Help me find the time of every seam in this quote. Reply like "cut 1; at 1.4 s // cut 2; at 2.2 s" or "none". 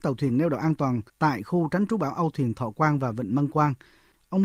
cut 1; at 1.1 s